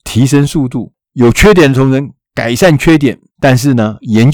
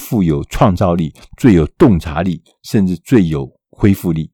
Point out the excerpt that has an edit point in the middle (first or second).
first